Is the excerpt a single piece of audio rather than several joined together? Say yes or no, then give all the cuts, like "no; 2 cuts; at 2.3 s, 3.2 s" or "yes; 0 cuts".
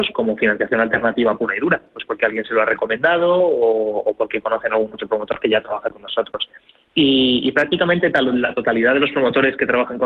yes; 0 cuts